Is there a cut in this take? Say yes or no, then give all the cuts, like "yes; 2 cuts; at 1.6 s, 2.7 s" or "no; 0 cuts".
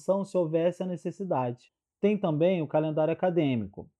no; 0 cuts